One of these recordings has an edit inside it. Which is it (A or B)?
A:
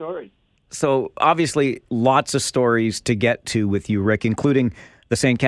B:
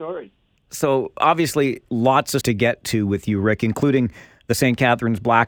B